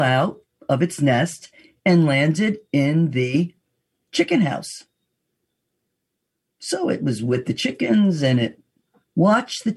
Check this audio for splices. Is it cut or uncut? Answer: uncut